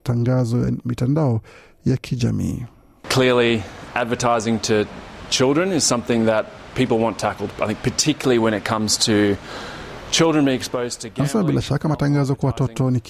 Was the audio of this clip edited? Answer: no; 0 cuts

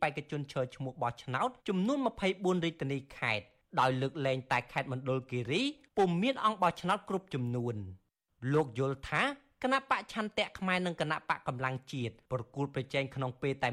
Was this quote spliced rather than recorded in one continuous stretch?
yes; 1 cut; at 1.6 s

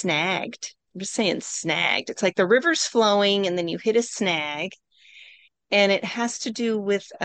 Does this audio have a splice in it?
no; 0 cuts

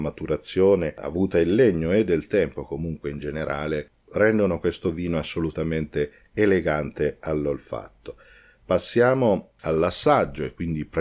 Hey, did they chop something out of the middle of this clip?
no; 0 cuts

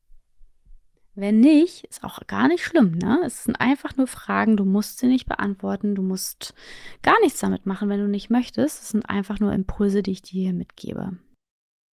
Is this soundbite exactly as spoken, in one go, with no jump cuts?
yes; 0 cuts

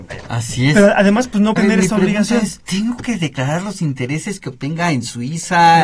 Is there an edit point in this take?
yes; 2 cuts; at 1.6 s, 2.6 s

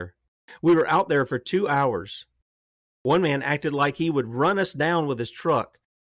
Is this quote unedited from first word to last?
yes; 0 cuts

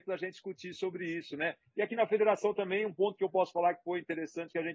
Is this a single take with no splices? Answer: yes; 0 cuts

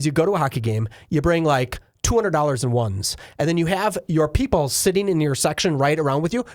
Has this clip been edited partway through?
no; 0 cuts

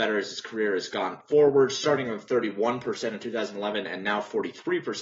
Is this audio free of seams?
yes; 0 cuts

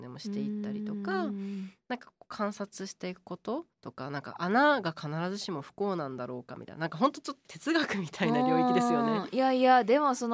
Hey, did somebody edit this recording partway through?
yes; 1 cut; at 3.7 s

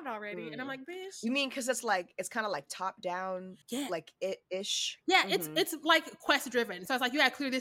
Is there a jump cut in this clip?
yes; 1 cut; at 3.6 s

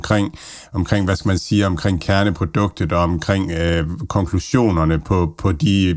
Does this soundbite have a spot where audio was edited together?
no; 0 cuts

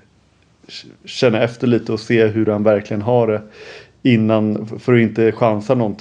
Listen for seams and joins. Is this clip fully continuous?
yes; 0 cuts

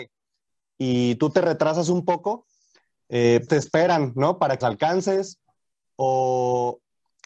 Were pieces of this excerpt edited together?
yes; 2 cuts; at 3.5 s, 4.6 s

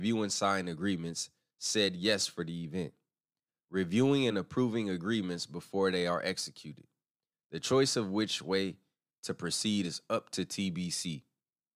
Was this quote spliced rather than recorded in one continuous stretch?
no; 0 cuts

